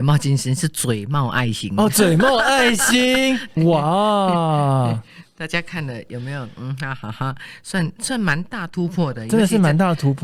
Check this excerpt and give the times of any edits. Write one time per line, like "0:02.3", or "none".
0:03.6